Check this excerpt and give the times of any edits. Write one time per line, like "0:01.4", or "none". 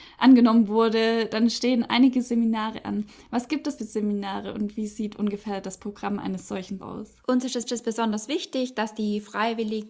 0:03.8
0:06.8
0:07.2
0:07.7